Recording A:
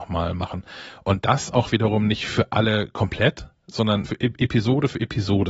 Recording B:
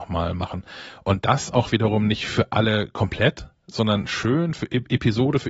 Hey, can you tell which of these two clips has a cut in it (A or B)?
A